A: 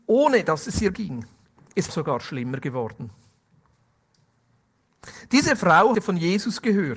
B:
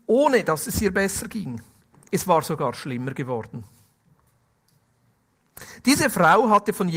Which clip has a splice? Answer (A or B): A